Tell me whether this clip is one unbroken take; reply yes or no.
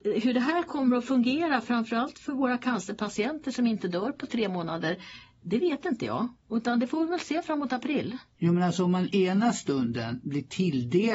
no